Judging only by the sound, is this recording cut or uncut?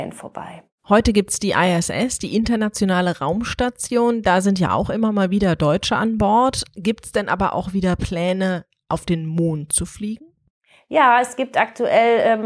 uncut